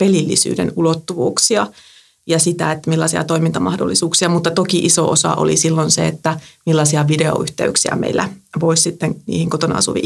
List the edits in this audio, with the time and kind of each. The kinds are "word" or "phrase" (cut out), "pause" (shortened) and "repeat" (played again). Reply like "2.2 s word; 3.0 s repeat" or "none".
none